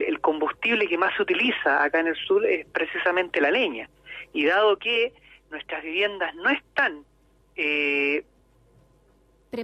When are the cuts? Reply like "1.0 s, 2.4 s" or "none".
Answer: none